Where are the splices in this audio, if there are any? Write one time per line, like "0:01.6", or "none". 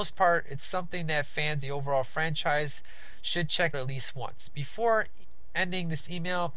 0:01.6
0:03.7